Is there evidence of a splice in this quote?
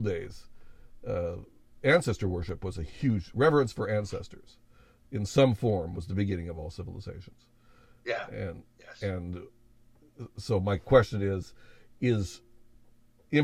no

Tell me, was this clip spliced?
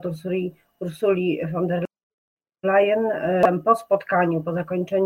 no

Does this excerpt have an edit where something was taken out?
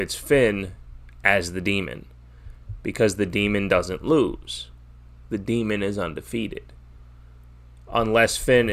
no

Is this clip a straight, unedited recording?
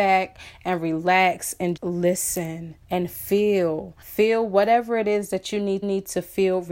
no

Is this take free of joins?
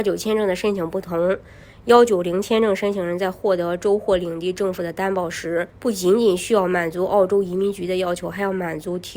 no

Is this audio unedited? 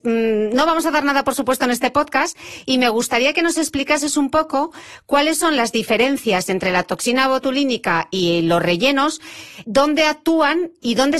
no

